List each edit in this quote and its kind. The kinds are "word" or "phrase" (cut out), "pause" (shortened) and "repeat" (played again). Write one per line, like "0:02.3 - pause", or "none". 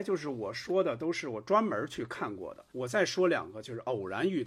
0:02.7 - pause

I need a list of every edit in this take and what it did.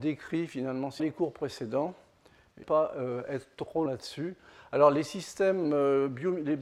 0:01.0 - phrase
0:02.6 - phrase
0:03.9 - word

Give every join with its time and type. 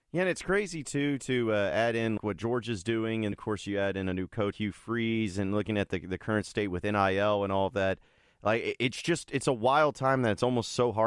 0:02.2 - word
0:03.3 - word
0:04.5 - word

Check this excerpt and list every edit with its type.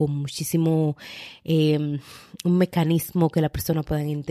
none

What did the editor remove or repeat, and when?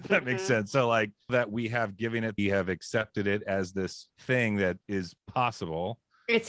0:01.3 - word
0:02.4 - phrase
0:04.1 - pause
0:04.8 - pause

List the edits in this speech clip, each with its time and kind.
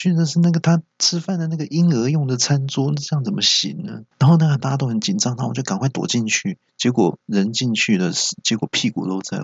0:00.9 - pause
0:04.1 - pause
0:04.6 - phrase
0:06.7 - pause
0:07.2 - pause

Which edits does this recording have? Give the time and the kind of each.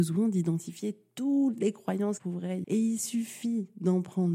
0:02.2 - word
0:02.6 - word

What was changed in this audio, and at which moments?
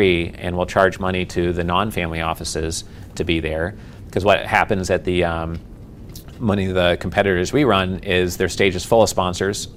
none

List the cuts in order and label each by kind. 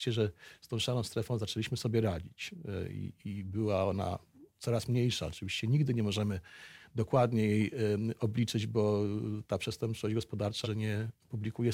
0:10.6 - phrase

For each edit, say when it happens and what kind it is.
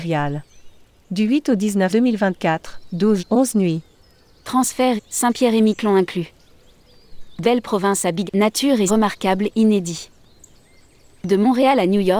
0:01.9 - word
0:03.2 - word
0:05.0 - phrase
0:07.4 - word
0:08.3 - word
0:08.9 - word

